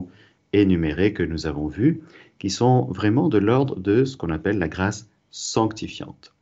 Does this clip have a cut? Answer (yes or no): no